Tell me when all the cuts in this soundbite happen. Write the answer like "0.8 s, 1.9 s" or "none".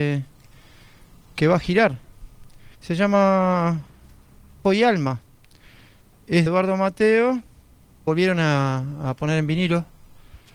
2.7 s, 4.6 s, 6.5 s, 8.1 s